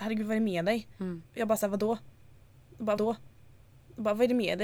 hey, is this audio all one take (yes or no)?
no